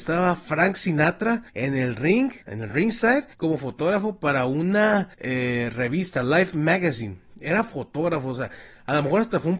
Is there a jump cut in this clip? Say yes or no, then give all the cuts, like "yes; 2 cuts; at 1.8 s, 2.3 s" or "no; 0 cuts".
yes; 4 cuts; at 1.5 s, 2.4 s, 3.3 s, 5.1 s